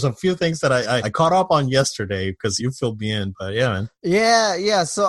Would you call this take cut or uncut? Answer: cut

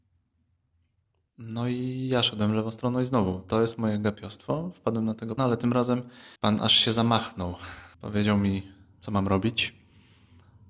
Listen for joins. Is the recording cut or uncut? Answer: cut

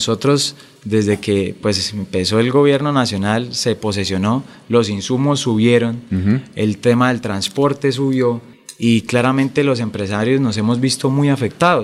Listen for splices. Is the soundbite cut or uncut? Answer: uncut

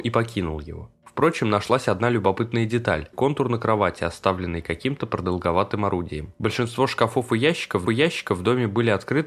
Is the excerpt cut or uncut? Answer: cut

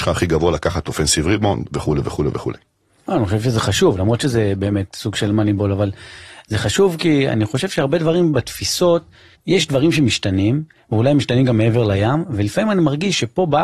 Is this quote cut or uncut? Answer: uncut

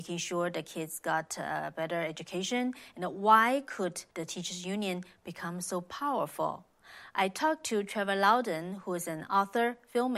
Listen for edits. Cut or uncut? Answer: cut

